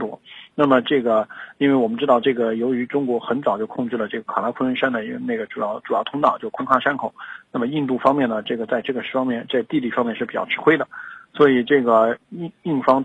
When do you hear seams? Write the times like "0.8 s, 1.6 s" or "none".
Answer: none